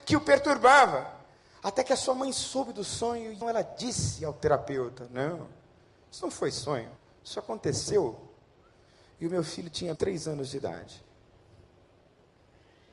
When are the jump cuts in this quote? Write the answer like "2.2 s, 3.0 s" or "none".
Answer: 3.4 s, 7.0 s, 10.0 s